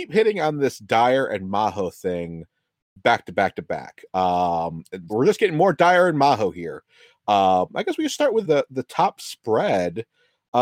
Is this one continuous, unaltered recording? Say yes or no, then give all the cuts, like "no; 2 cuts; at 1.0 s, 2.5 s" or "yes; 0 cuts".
no; 2 cuts; at 5.1 s, 8.4 s